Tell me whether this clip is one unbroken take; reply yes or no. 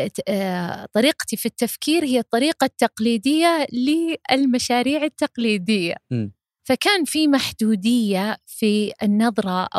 yes